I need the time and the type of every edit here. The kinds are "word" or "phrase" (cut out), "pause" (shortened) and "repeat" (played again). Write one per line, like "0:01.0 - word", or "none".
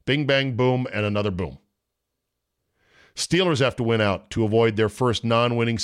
none